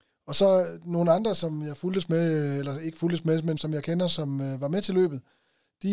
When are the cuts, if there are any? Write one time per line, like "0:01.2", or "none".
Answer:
0:03.6